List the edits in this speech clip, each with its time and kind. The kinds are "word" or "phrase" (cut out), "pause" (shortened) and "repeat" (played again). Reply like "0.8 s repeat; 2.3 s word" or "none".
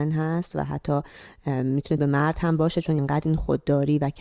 2.0 s word; 3.0 s word